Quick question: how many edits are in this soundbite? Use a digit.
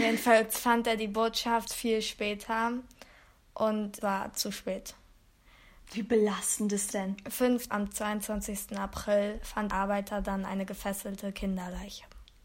6